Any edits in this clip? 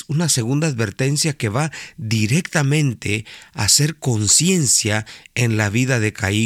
no; 0 cuts

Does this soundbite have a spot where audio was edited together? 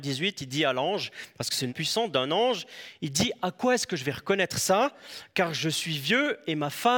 yes; 1 cut; at 1.7 s

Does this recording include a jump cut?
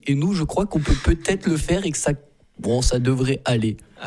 no; 0 cuts

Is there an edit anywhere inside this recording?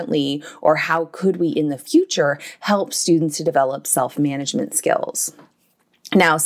no; 0 cuts

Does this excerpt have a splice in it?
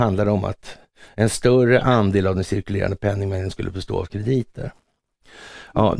no; 0 cuts

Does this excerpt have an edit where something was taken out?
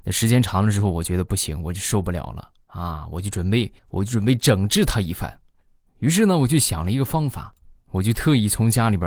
yes; 1 cut; at 3.8 s

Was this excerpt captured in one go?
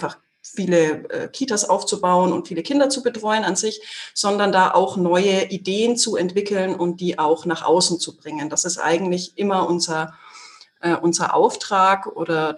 yes; 0 cuts

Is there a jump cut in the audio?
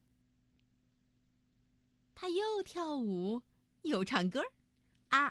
no; 0 cuts

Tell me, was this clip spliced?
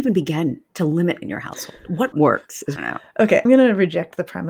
yes; 4 cuts; at 1.2 s, 2.1 s, 2.8 s, 3.5 s

